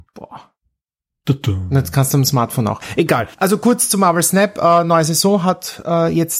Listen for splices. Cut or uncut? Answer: cut